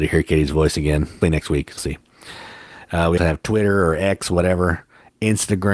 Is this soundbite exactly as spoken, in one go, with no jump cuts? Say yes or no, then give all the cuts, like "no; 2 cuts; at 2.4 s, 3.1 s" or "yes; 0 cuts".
no; 3 cuts; at 1.2 s, 1.8 s, 3.2 s